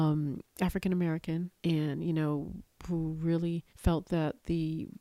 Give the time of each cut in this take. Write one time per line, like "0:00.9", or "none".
0:01.6
0:03.7